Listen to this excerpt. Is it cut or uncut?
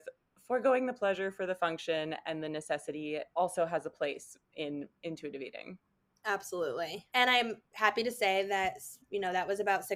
cut